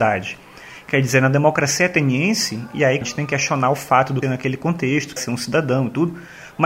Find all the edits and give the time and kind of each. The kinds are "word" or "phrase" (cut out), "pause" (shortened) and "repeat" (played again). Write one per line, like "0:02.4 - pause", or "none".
0:03.0 - word
0:04.2 - phrase
0:05.2 - phrase